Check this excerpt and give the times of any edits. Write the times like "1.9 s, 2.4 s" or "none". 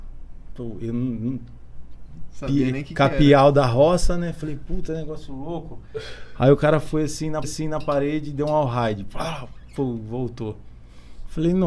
7.4 s